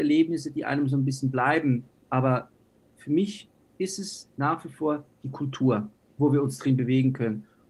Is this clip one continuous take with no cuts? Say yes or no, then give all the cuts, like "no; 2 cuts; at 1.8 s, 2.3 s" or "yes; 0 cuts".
yes; 0 cuts